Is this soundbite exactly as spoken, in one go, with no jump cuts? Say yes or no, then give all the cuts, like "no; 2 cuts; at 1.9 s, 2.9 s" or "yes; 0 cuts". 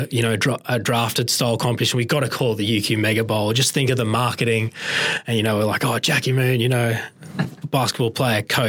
yes; 0 cuts